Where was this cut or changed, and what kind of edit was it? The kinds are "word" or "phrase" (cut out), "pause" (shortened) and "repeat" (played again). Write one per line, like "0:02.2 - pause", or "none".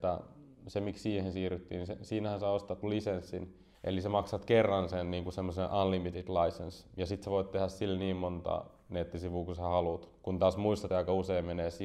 0:02.8 - word
0:03.7 - pause
0:10.9 - word